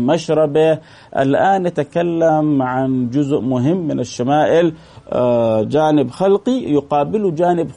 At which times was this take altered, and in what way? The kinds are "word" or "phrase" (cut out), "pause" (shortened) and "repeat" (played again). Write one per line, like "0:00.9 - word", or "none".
none